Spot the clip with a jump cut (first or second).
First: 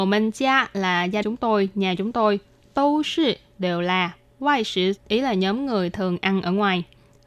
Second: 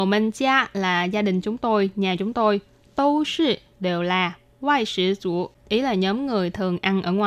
first